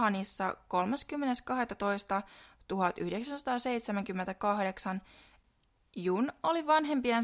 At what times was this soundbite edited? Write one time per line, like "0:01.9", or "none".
none